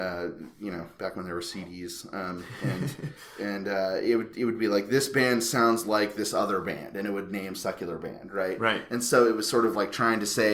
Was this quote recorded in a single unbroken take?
no; 1 cut; at 7.5 s

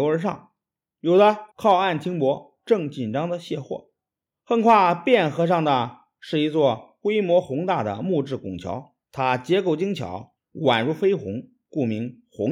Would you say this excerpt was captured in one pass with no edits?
no; 4 cuts; at 1.5 s, 4.1 s, 9.0 s, 10.4 s

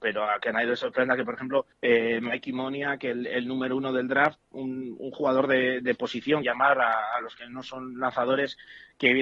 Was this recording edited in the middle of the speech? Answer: yes; 2 cuts; at 1.7 s, 6.4 s

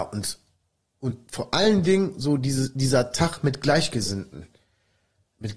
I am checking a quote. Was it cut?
no; 0 cuts

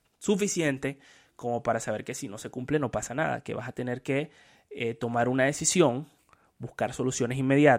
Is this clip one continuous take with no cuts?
yes; 0 cuts

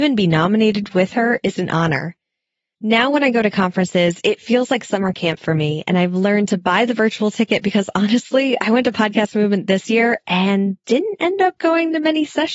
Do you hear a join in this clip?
no; 0 cuts

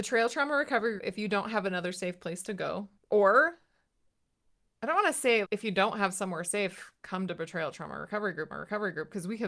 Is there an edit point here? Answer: yes; 4 cuts; at 1.0 s, 3.0 s, 5.4 s, 8.5 s

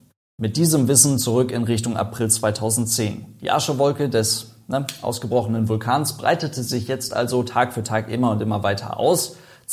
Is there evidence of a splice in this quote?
no; 0 cuts

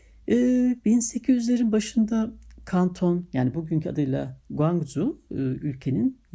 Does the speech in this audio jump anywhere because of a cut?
no; 0 cuts

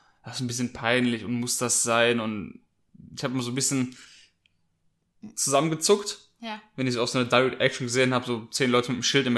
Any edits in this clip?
no; 0 cuts

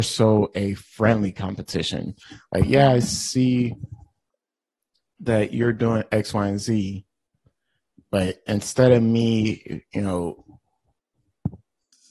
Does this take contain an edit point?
no; 0 cuts

